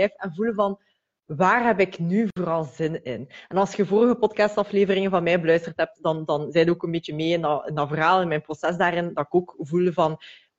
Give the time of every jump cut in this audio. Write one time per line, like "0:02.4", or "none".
none

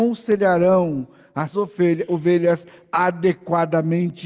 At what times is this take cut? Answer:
0:01.5

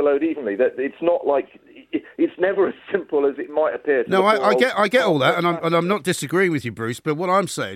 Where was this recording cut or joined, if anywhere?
none

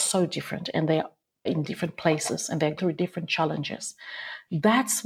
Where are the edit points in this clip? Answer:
0:01.5
0:02.8

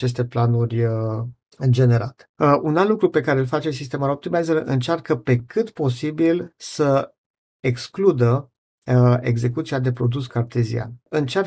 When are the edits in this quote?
none

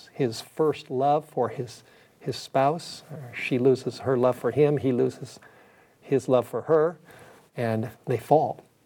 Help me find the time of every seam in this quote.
0:07.9

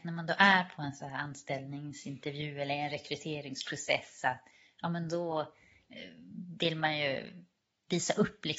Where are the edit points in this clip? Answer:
none

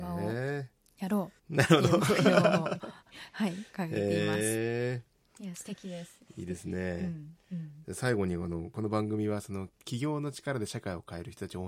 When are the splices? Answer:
0:01.4

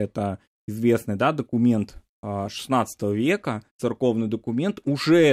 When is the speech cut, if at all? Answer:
0:02.1
0:03.7

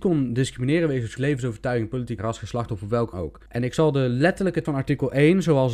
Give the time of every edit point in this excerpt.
0:01.2
0:02.2
0:03.1
0:03.5
0:04.6

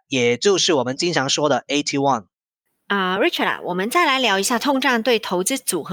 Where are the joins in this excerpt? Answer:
none

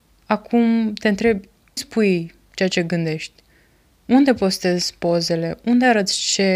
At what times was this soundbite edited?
0:01.8

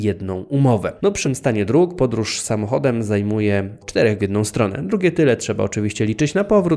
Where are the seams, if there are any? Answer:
0:01.2
0:03.8
0:04.2

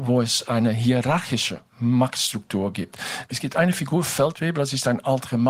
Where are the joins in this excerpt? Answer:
none

